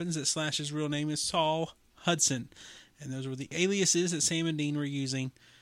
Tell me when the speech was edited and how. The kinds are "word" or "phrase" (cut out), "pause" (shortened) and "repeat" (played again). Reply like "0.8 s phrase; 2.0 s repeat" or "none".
none